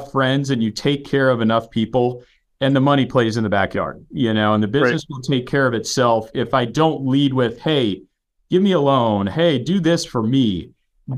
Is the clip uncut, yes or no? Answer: yes